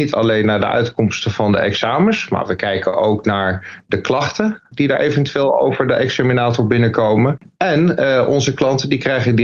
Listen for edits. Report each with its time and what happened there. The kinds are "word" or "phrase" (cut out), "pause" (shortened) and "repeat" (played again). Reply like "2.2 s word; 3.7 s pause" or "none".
none